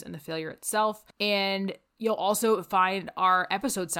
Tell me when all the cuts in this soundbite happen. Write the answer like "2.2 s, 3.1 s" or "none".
1.1 s